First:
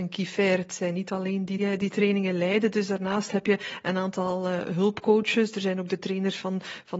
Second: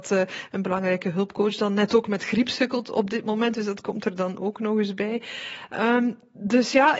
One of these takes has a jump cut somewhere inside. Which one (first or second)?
first